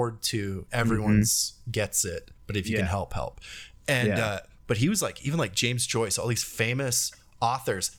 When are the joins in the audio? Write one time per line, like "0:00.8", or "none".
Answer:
0:02.4